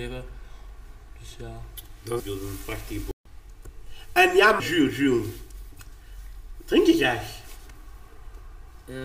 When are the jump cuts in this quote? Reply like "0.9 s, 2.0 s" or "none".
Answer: 2.2 s, 4.6 s